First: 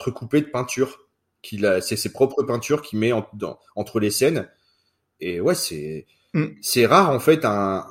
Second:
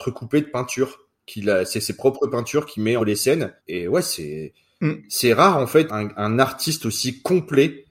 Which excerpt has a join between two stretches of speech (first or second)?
second